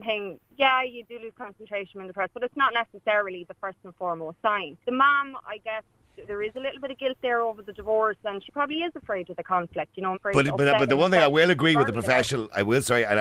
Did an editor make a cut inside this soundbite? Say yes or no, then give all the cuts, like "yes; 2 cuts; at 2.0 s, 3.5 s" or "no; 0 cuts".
yes; 3 cuts; at 4.8 s, 6.3 s, 10.1 s